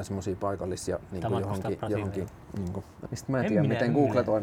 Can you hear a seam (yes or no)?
yes